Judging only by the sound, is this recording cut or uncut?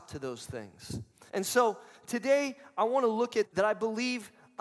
cut